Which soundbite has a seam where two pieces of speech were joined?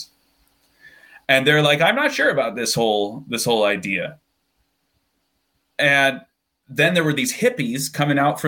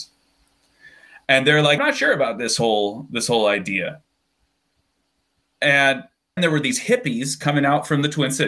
second; 2 cuts; at 1.8 s, 6.4 s

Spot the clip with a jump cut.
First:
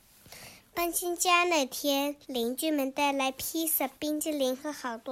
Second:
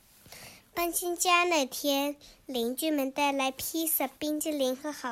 first; 1 cut; at 2.2 s

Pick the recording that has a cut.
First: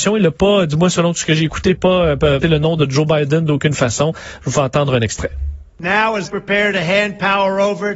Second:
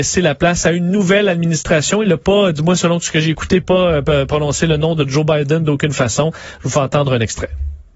first; 3 cuts; at 2.4 s, 5.7 s, 6.2 s

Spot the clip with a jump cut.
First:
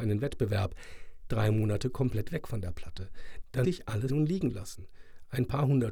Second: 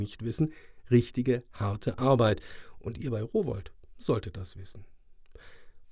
first; 3 cuts; at 1.3 s, 3.6 s, 4.1 s

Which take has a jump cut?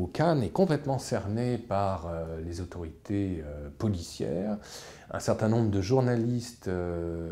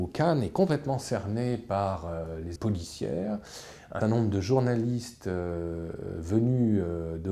second; 2 cuts; at 2.6 s, 4.0 s

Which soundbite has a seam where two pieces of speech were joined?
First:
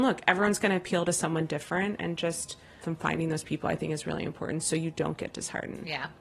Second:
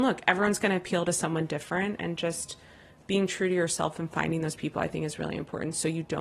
first; 1 cut; at 2.8 s

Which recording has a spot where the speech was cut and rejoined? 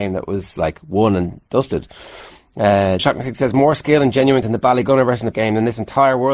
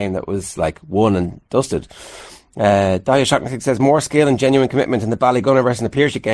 first; 3 cuts; at 3.0 s, 4.4 s, 5.3 s

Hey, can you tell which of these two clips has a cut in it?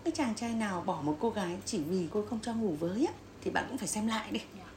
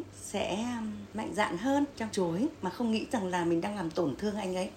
second; 1 cut; at 2.1 s

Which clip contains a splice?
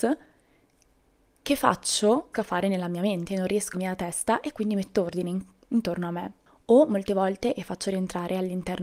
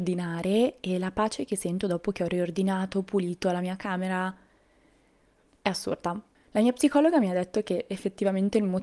first; 2 cuts; at 2.3 s, 3.7 s

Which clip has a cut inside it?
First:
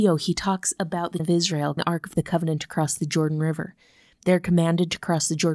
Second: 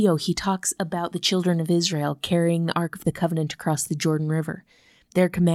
first; 2 cuts; at 1.2 s, 1.8 s

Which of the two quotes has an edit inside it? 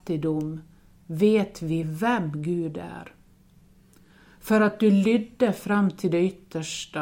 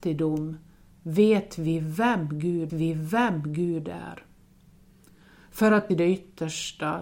second; 2 cuts; at 2.7 s, 5.9 s

